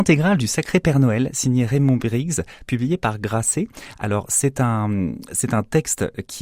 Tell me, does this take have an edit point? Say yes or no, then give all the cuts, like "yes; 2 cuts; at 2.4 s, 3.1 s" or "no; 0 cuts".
no; 0 cuts